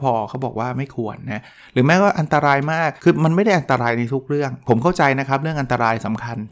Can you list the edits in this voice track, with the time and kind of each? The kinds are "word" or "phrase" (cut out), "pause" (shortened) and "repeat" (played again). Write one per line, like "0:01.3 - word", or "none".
0:03.0 - pause